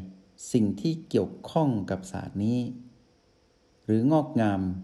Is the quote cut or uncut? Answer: uncut